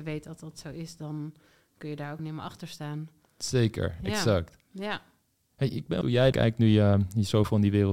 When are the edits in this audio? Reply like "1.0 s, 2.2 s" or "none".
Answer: 2.2 s, 6.0 s, 6.3 s